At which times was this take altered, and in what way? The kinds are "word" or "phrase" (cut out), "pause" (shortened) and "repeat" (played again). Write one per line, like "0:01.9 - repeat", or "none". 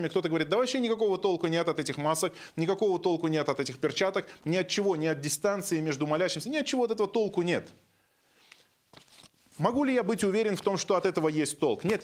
none